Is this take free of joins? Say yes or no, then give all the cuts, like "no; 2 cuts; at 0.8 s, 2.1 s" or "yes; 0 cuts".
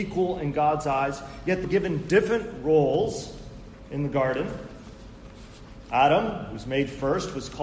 no; 1 cut; at 1.6 s